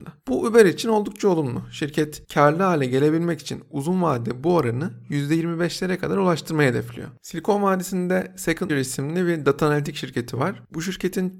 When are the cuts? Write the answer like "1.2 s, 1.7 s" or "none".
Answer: 8.7 s